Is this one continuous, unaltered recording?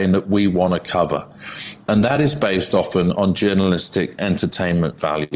yes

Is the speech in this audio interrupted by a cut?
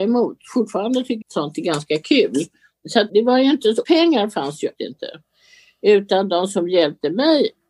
yes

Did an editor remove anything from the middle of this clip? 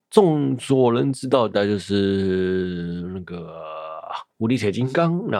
yes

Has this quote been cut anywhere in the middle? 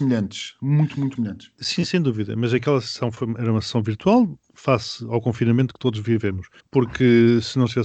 yes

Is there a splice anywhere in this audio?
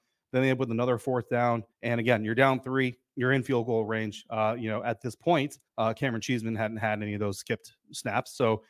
yes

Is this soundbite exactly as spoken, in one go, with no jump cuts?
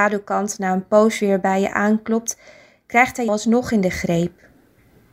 no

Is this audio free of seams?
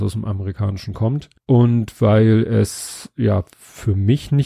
no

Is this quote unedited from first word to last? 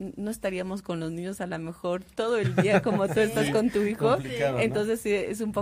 yes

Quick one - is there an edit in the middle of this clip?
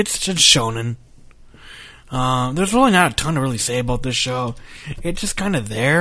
no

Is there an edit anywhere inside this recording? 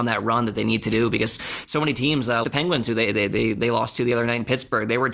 yes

